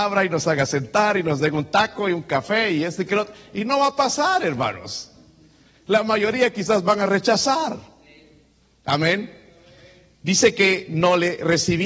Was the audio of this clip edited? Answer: no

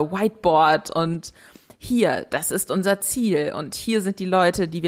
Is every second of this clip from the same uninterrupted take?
yes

